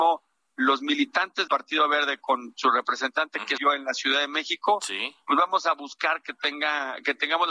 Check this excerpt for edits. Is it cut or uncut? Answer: cut